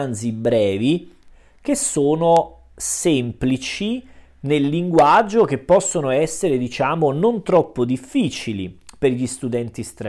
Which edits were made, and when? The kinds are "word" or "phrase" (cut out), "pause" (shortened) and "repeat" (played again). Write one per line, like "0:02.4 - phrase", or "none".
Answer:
none